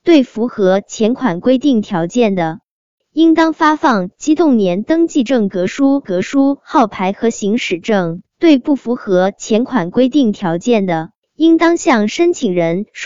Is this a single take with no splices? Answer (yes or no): no